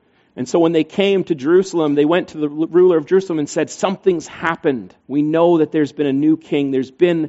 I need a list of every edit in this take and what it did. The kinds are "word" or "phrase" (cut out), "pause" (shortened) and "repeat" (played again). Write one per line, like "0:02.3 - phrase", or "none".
0:05.0 - pause